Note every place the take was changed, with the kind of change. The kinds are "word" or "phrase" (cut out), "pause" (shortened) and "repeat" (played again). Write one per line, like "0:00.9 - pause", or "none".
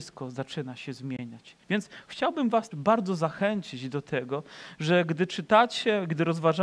0:01.6 - pause
0:02.7 - word

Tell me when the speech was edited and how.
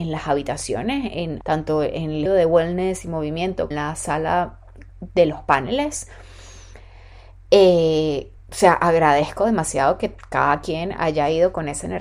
0:01.4 - word
0:02.3 - word
0:03.7 - phrase
0:04.9 - pause
0:08.4 - pause

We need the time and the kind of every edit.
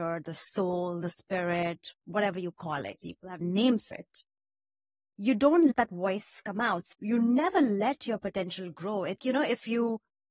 0:03.4 - word
0:03.9 - word
0:05.7 - word
0:06.9 - word
0:09.2 - word

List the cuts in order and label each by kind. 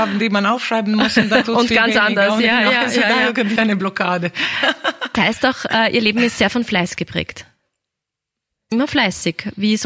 0:01.4 - word
0:03.6 - word
0:05.1 - word
0:08.7 - word

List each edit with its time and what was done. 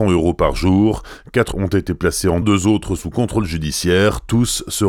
0:01.5 - word
0:02.4 - word
0:03.0 - word

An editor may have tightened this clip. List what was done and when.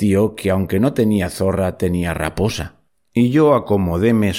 none

